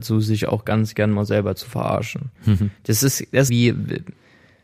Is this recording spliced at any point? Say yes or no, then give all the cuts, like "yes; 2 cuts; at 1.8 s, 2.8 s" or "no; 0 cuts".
yes; 2 cuts; at 2.4 s, 3.5 s